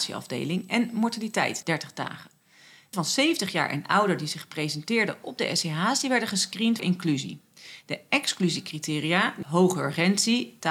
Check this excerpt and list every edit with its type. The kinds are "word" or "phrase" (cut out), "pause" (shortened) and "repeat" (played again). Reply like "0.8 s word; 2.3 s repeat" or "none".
1.6 s word; 2.9 s word; 6.8 s word; 9.4 s word